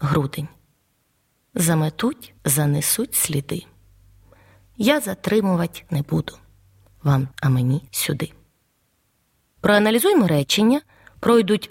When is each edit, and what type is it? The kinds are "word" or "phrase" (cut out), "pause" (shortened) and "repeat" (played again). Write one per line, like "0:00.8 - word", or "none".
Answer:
0:02.4 - pause
0:05.9 - word
0:07.3 - word
0:07.9 - pause